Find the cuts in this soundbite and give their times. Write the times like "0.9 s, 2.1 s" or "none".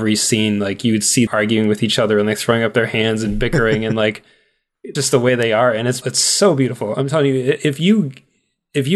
1.3 s, 5.0 s, 6.0 s